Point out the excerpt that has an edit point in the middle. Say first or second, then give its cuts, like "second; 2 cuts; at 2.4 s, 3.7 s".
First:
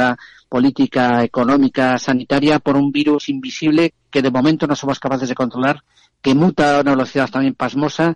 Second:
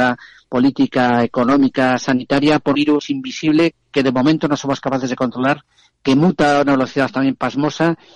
second; 1 cut; at 2.7 s